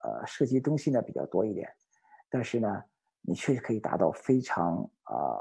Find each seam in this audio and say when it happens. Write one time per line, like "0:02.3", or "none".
none